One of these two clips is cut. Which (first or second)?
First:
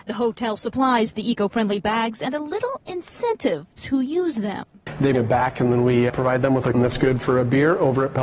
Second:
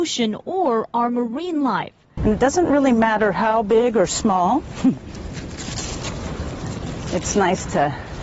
first